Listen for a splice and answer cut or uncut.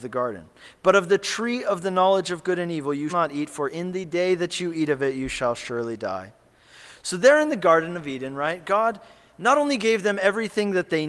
cut